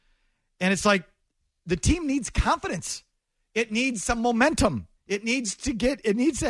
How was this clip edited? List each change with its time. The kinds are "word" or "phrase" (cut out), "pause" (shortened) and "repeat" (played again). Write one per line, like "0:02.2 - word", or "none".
0:05.0 - pause